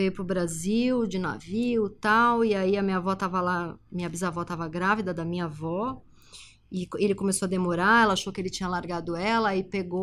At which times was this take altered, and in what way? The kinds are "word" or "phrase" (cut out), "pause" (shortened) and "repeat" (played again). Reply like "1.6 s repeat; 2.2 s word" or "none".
none

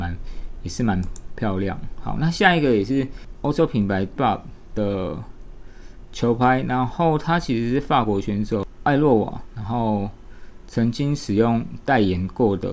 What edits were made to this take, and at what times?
4.2 s word

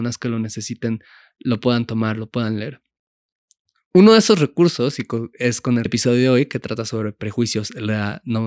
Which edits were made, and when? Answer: 5.9 s phrase

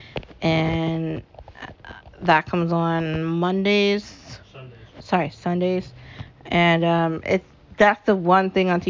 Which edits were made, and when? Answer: 4.4 s pause

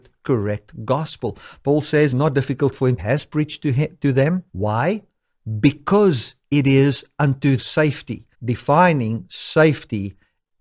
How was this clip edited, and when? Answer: 2.1 s word; 3.0 s phrase; 4.5 s pause; 7.6 s word; 8.3 s pause

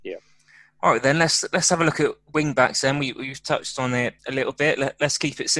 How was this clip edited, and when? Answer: 4.2 s pause

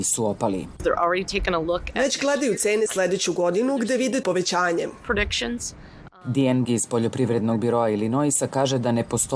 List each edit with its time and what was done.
2.9 s word; 4.2 s word; 6.6 s word

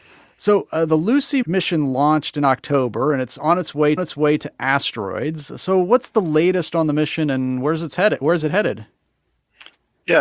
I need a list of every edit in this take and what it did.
1.4 s word; 4.0 s repeat

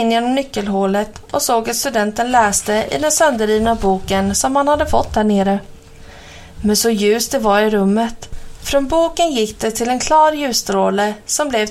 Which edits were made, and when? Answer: none

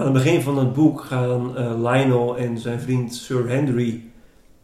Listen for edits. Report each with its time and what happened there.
none

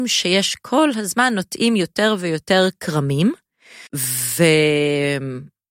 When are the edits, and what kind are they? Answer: 3.9 s pause

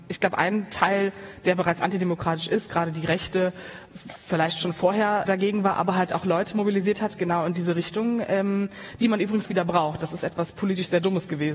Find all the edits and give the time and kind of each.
5.2 s word; 9.4 s phrase

